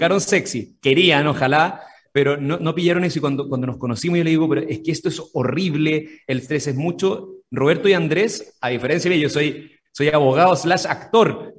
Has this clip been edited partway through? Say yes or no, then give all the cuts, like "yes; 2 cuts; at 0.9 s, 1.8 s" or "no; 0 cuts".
no; 0 cuts